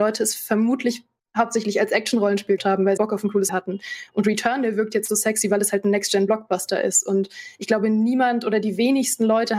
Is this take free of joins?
no; 3 cuts; at 2.6 s, 3.0 s, 3.5 s

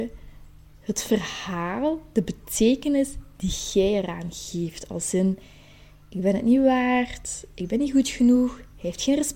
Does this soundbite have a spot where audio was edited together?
no; 0 cuts

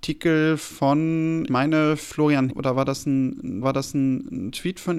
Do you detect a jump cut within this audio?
yes; 3 cuts; at 1.5 s, 2.5 s, 3.6 s

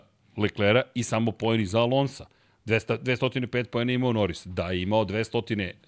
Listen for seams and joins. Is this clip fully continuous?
yes; 0 cuts

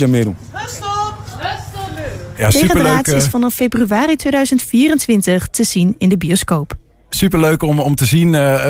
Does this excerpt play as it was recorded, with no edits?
yes; 0 cuts

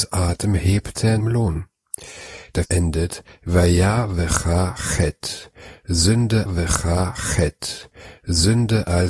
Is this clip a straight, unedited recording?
no; 3 cuts; at 1.2 s, 2.6 s, 6.5 s

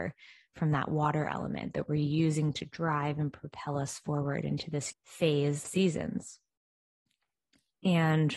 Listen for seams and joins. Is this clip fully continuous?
no; 2 cuts; at 4.9 s, 5.6 s

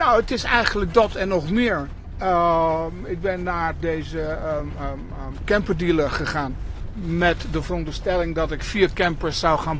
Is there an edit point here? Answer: no; 0 cuts

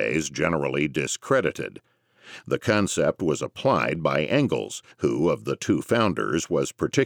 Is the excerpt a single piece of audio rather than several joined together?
no; 1 cut; at 4.9 s

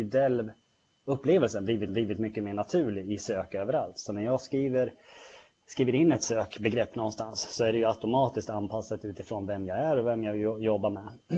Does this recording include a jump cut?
yes; 1 cut; at 1.9 s

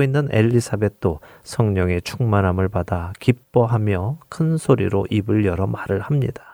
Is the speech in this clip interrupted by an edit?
no; 0 cuts

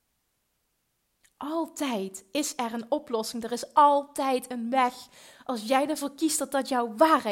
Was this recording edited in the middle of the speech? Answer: no; 0 cuts

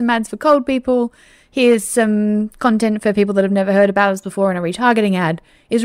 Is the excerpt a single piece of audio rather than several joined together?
yes; 0 cuts

